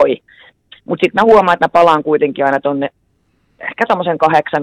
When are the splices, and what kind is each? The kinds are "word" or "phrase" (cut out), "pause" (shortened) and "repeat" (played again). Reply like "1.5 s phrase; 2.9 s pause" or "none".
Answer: none